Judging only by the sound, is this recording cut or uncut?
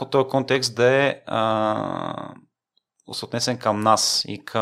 uncut